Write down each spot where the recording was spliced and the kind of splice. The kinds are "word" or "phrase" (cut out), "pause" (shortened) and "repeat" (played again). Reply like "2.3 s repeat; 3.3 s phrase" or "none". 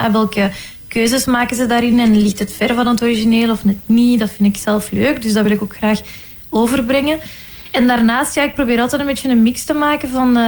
none